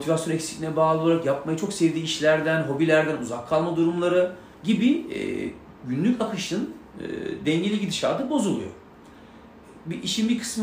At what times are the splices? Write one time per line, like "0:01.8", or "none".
0:04.5